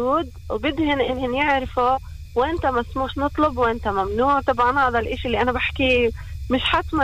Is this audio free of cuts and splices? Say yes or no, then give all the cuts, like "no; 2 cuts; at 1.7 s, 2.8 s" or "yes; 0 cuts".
yes; 0 cuts